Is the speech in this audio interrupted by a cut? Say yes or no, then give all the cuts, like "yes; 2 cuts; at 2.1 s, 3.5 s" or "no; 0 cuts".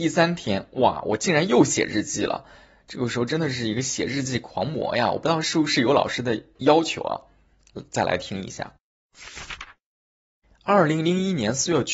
no; 0 cuts